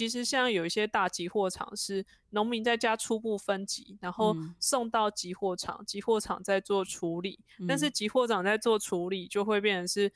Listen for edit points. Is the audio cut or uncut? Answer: uncut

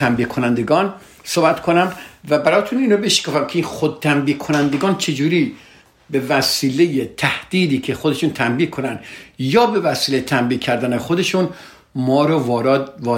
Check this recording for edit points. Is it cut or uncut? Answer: uncut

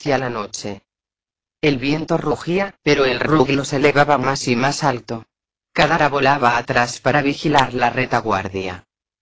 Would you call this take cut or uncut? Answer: uncut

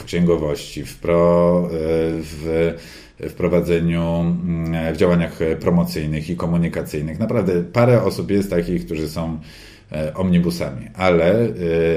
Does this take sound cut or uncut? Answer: uncut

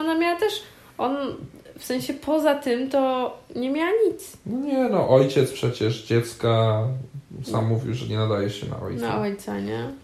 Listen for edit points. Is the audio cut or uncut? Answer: uncut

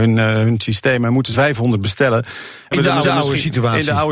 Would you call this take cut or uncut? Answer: cut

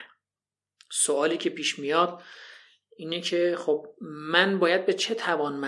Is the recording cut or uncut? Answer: uncut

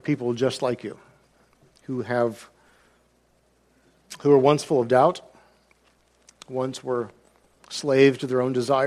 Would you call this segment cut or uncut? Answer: uncut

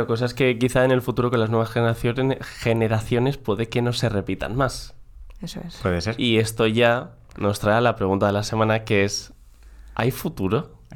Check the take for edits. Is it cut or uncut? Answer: uncut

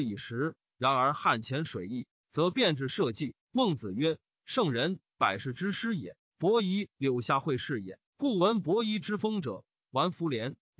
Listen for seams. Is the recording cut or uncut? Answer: cut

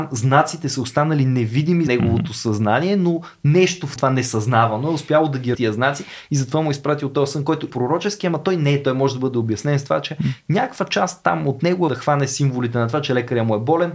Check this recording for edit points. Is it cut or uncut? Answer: cut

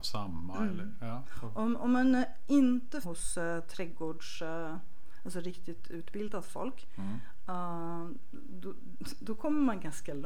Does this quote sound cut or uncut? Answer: cut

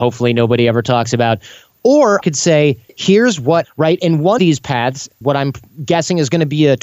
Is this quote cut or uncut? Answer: cut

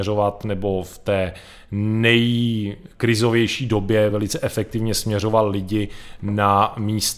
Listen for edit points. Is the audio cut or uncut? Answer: uncut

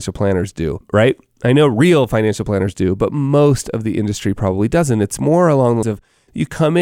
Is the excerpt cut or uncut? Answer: cut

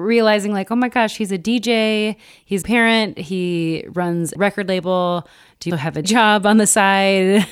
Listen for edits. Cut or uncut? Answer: cut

